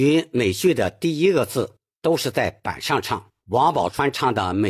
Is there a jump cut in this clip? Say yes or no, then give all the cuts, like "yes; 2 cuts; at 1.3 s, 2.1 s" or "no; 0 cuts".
yes; 1 cut; at 3.4 s